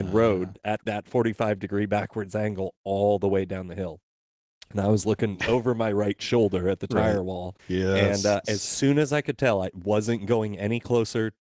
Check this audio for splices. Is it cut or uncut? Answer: cut